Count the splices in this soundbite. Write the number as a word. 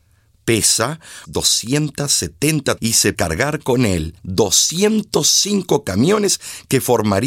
four